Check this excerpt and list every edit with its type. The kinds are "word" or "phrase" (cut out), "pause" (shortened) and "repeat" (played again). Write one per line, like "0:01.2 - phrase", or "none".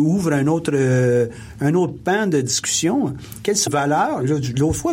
0:03.7 - word